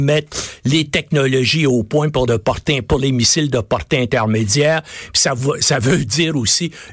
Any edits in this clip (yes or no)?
yes